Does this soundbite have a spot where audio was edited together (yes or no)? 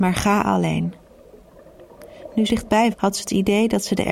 yes